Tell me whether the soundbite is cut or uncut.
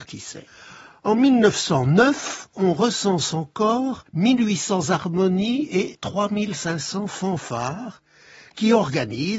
uncut